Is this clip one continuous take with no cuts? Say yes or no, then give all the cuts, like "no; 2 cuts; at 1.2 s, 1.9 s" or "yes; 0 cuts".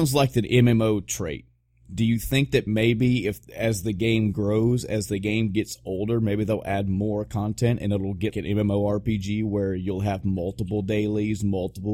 no; 1 cut; at 8.3 s